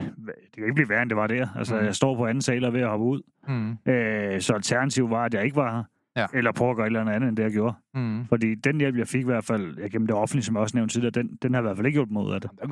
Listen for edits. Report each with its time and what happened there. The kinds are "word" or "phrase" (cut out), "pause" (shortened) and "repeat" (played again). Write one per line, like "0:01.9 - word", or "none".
none